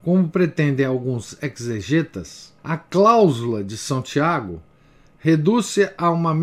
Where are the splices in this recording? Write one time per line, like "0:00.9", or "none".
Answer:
0:02.6